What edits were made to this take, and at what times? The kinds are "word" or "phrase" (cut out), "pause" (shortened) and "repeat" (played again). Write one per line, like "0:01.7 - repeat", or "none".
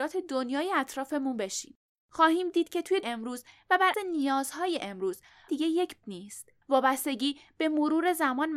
0:01.9 - pause
0:03.0 - word
0:03.9 - word
0:05.5 - word
0:06.0 - word
0:06.6 - pause